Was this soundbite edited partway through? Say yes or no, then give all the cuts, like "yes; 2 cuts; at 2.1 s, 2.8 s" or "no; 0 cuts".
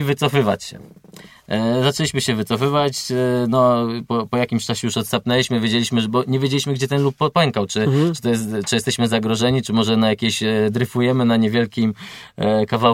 no; 0 cuts